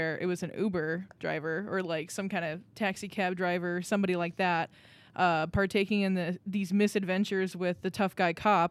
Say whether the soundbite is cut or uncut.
uncut